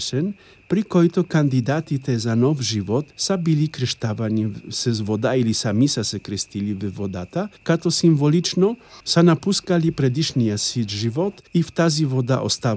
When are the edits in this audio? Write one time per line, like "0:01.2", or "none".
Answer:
0:03.1
0:07.6
0:09.0
0:11.5